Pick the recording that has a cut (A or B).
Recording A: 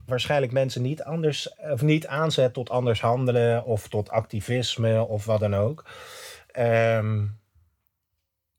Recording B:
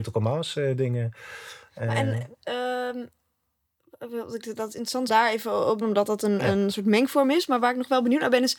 B